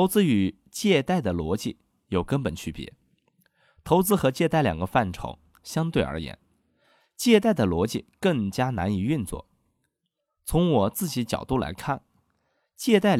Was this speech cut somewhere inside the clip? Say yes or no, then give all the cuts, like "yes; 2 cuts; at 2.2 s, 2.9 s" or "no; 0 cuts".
no; 0 cuts